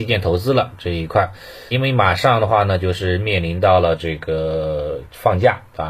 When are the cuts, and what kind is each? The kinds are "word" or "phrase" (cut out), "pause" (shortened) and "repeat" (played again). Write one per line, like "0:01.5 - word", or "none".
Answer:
0:01.7 - word